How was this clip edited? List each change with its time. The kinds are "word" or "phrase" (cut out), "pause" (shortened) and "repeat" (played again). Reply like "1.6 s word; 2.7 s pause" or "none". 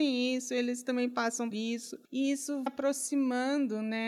1.5 s word; 2.0 s pause; 2.7 s word